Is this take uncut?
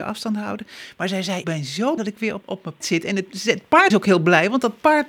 no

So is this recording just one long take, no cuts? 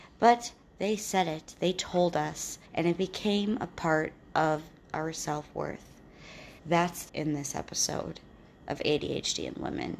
no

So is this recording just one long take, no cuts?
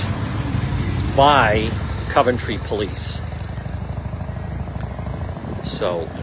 yes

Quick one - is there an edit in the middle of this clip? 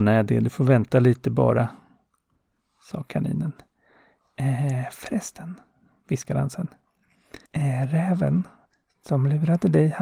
yes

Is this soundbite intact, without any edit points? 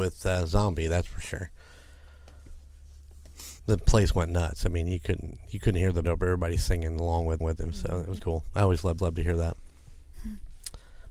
no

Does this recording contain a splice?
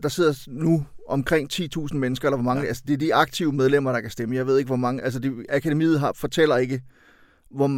no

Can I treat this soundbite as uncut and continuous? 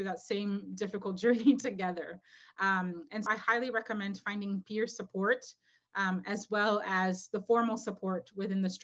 no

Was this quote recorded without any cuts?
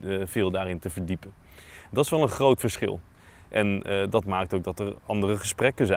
yes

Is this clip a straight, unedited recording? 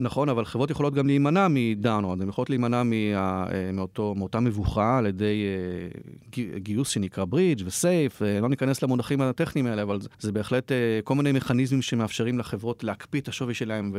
no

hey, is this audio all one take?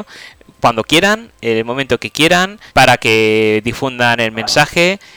no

